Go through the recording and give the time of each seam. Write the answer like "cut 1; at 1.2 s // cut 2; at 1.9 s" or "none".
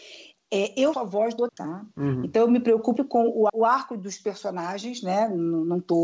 cut 1; at 0.9 s // cut 2; at 1.5 s // cut 3; at 3.0 s // cut 4; at 3.5 s

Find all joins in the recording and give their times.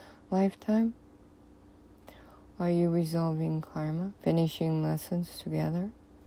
cut 1; at 4.2 s

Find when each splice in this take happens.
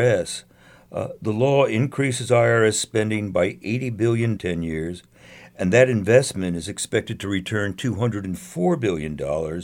cut 1; at 4.4 s

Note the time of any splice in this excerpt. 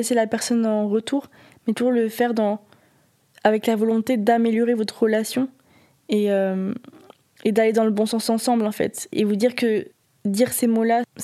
none

